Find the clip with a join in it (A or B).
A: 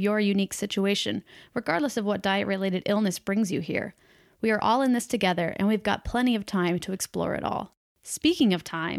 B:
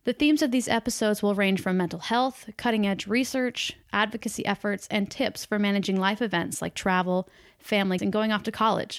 B